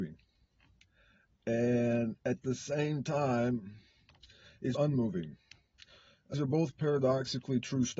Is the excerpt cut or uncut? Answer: cut